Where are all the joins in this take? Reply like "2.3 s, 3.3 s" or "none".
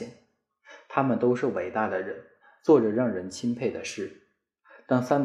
none